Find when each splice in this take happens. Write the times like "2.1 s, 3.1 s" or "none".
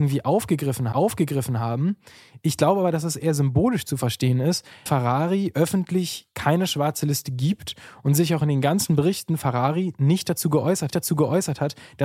0.9 s, 4.9 s, 10.9 s